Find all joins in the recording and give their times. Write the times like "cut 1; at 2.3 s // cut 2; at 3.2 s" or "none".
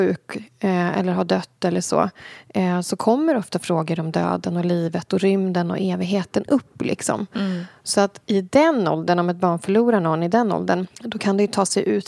cut 1; at 8.2 s // cut 2; at 10.9 s